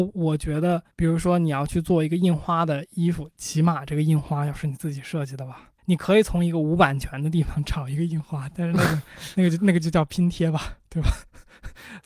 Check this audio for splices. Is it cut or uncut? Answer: cut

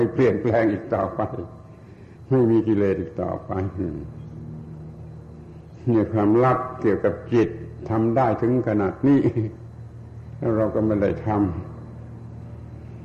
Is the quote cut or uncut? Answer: uncut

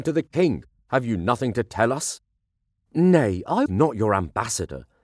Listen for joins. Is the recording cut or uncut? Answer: cut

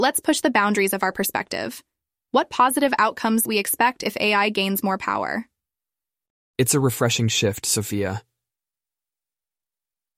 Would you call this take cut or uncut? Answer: cut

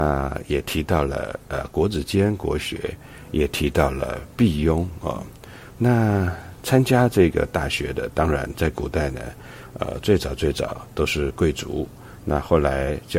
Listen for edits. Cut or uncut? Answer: uncut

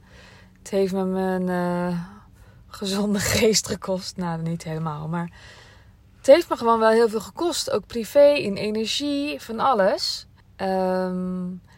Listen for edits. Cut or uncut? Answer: cut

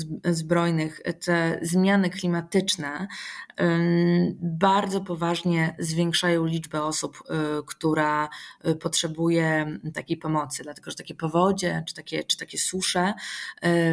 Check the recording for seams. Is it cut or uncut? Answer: uncut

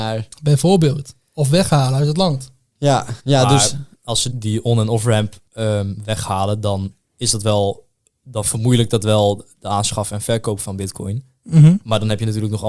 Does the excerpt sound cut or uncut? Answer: cut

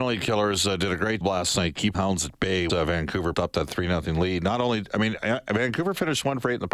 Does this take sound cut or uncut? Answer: cut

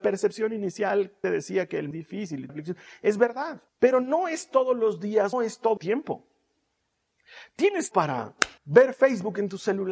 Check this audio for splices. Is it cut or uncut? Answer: cut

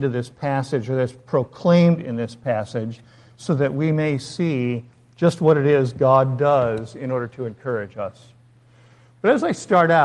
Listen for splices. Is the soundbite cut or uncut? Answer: uncut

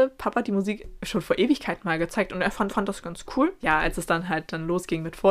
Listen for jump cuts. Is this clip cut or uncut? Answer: cut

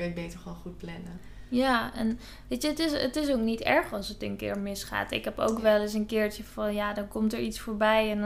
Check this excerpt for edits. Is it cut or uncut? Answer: uncut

